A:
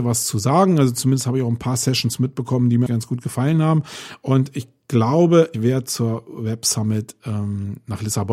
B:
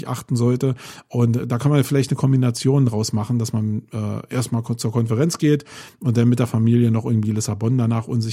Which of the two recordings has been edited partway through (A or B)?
A